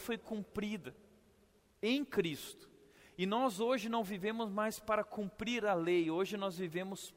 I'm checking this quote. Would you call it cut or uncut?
uncut